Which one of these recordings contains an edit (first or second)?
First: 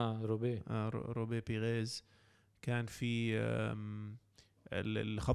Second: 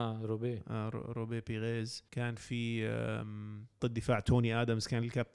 second